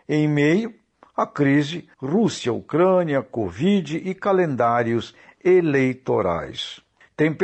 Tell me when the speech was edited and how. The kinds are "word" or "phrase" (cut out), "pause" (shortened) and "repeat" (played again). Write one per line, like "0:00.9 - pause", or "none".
0:01.9 - pause

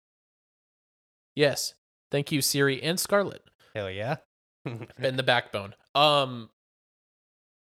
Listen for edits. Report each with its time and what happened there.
none

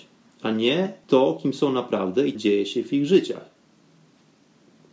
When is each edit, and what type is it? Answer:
0:02.3 - phrase

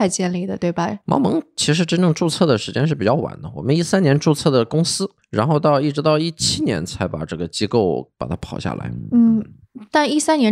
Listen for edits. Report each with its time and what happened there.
0:01.0 - pause

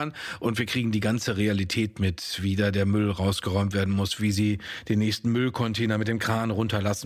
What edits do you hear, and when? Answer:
none

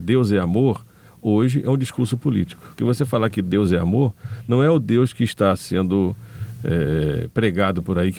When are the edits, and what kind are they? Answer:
0:02.7 - pause

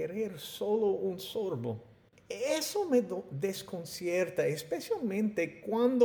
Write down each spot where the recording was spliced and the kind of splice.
none

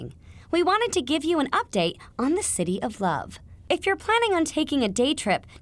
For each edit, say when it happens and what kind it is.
none

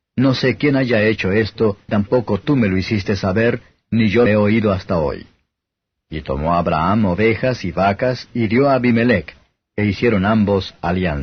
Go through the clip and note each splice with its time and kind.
0:01.9 - word
0:04.3 - word

